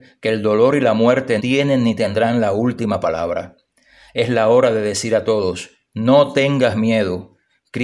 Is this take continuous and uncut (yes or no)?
no